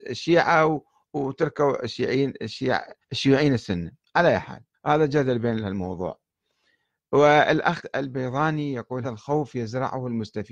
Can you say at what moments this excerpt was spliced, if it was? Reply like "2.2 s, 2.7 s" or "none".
3.0 s, 4.7 s, 5.6 s, 7.8 s, 9.0 s